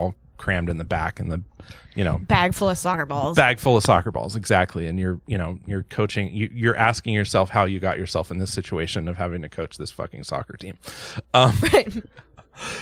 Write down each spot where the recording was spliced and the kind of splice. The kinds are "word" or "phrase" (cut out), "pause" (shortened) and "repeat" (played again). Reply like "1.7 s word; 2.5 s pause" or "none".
none